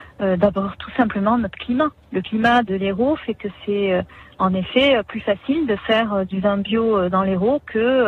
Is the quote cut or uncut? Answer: uncut